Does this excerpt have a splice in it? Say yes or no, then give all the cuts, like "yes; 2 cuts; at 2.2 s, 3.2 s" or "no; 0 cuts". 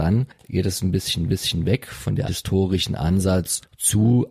yes; 2 cuts; at 1.3 s, 2.3 s